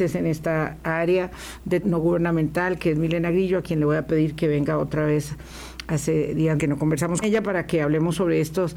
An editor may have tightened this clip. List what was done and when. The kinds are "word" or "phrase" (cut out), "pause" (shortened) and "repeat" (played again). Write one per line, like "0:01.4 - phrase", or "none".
0:01.8 - word
0:06.6 - word
0:07.2 - word